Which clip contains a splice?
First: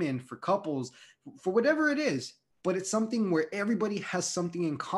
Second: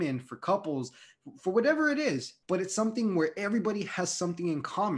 second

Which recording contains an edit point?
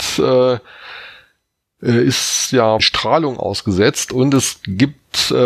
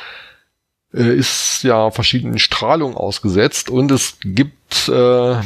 first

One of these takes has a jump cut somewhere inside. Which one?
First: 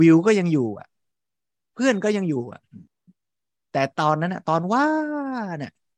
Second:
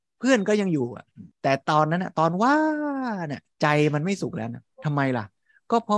second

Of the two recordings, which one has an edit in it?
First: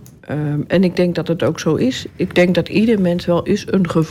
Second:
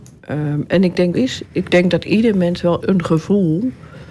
second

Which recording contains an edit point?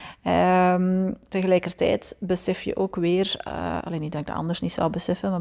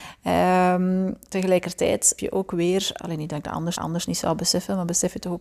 second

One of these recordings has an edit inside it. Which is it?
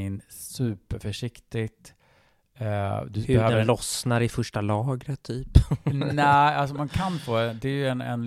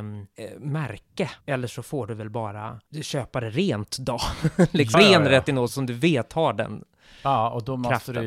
second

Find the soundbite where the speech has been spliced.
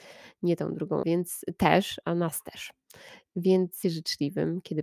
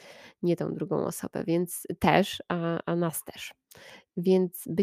first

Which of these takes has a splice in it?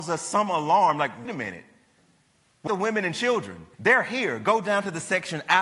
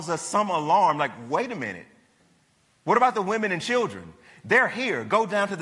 first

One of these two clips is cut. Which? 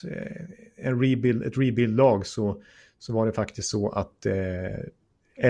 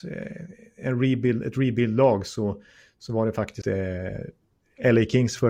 second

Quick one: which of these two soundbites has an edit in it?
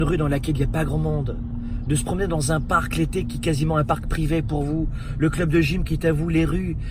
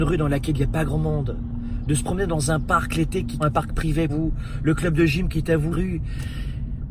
second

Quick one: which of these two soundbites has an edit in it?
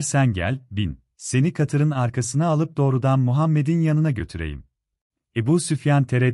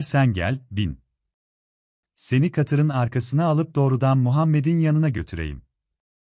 first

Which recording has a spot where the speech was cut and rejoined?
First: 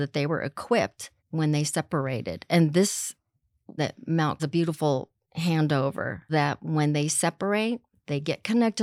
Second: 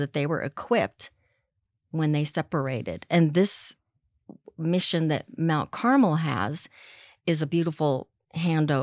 first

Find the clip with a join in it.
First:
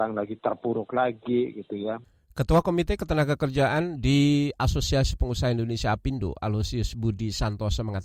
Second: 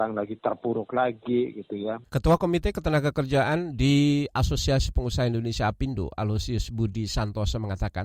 second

